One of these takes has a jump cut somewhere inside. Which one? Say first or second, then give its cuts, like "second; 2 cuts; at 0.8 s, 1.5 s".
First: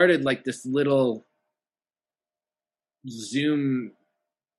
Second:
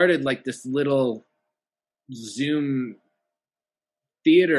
second; 1 cut; at 1.7 s